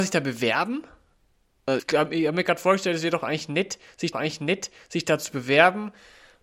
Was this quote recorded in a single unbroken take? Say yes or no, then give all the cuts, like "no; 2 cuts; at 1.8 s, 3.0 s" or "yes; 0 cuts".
no; 2 cuts; at 1.8 s, 4.1 s